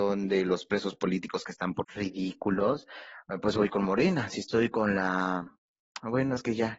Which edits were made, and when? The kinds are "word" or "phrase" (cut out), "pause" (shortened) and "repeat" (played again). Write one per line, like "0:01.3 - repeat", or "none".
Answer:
0:01.8 - phrase